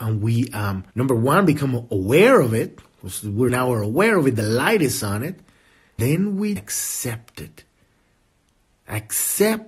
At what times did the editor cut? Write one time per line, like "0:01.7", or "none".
0:00.9
0:03.5
0:06.0
0:06.6